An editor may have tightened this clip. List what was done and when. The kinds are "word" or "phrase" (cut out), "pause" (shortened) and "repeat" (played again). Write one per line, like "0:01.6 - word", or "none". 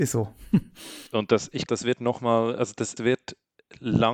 0:01.1 - pause
0:01.7 - word
0:03.0 - word